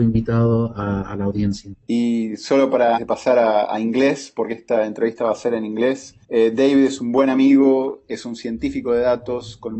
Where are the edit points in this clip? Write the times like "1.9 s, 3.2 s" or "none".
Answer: 1.8 s, 3.0 s, 6.2 s